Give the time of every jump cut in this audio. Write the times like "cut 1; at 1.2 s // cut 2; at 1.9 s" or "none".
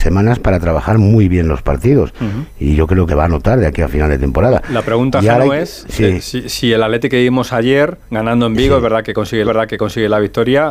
cut 1; at 3.1 s // cut 2; at 8.0 s // cut 3; at 9.4 s

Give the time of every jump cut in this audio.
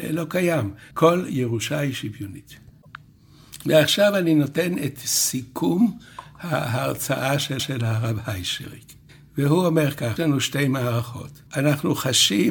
cut 1; at 0.9 s // cut 2; at 7.6 s // cut 3; at 9.1 s // cut 4; at 10.2 s // cut 5; at 11.5 s

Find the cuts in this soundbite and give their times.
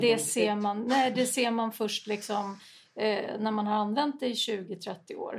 none

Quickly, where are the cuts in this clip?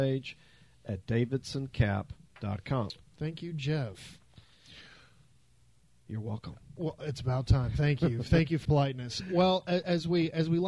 cut 1; at 8.6 s

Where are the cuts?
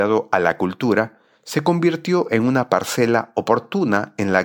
none

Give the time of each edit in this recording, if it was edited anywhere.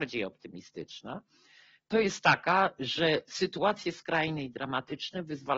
none

